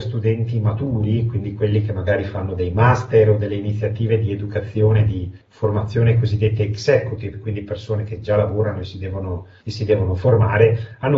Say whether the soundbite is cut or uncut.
cut